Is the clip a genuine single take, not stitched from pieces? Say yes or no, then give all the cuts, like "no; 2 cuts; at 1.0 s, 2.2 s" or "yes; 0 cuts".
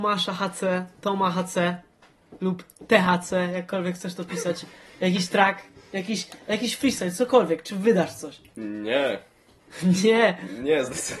yes; 0 cuts